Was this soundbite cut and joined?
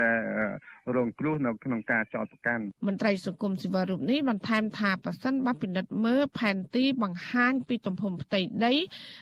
yes; 1 cut; at 2.8 s

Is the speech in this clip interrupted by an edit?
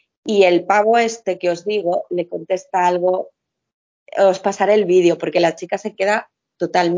no; 0 cuts

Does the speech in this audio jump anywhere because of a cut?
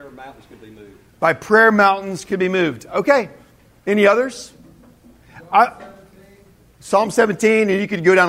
no; 0 cuts

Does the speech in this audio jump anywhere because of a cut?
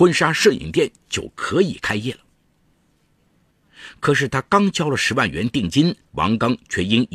yes; 1 cut; at 6.0 s

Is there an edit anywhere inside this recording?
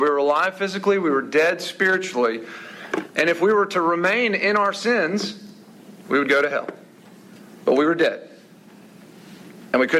no; 0 cuts

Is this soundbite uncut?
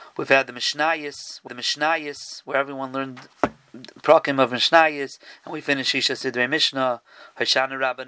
no; 2 cuts; at 1.5 s, 3.3 s

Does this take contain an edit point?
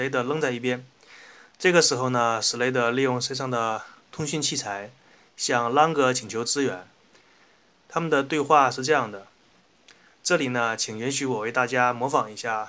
no; 0 cuts

